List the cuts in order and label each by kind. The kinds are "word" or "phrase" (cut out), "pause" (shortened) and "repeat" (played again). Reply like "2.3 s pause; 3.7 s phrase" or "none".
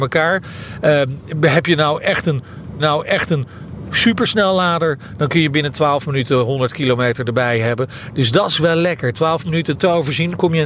2.8 s repeat; 9.7 s phrase